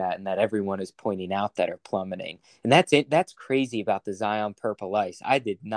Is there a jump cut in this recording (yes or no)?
no